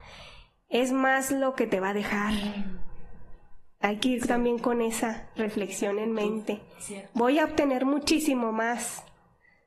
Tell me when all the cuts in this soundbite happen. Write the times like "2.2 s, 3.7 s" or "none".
3.7 s